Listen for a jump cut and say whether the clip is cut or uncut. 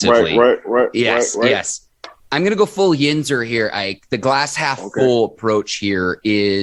cut